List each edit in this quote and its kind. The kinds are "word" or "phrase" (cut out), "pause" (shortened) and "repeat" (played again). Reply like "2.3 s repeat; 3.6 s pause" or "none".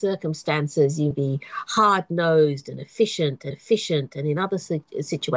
1.1 s word; 3.5 s repeat